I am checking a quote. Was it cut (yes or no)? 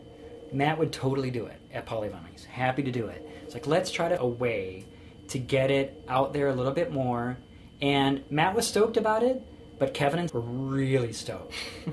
yes